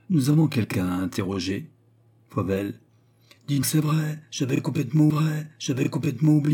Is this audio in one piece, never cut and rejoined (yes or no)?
no